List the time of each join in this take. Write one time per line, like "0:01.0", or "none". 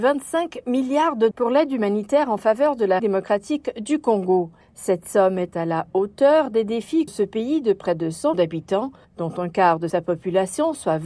0:01.3
0:03.0
0:07.1
0:08.3